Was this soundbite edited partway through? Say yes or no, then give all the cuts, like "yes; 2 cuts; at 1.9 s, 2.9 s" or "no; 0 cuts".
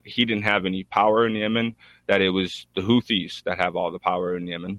no; 0 cuts